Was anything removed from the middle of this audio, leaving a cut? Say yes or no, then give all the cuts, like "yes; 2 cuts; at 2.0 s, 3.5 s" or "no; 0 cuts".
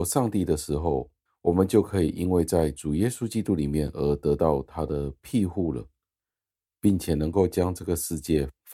no; 0 cuts